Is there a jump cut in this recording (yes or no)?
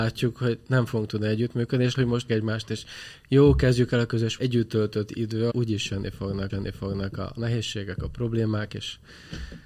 yes